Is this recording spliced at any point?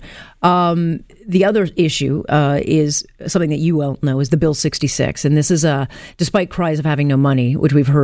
no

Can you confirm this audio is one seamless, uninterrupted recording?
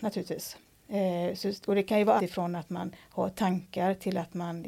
no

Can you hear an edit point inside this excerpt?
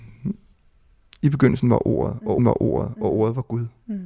yes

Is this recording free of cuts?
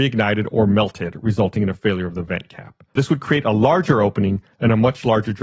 no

